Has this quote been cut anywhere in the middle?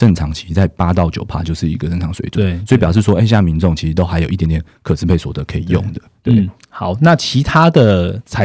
no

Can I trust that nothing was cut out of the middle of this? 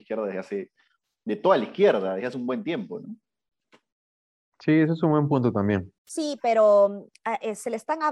no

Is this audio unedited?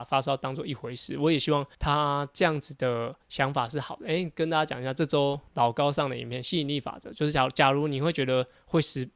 no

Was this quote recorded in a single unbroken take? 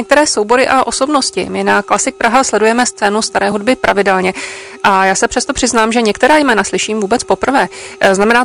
yes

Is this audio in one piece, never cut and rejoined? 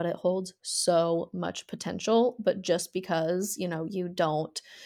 yes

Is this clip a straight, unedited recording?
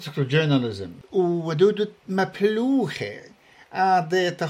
yes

